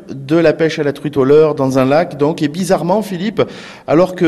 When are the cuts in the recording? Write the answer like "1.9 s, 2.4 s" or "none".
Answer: none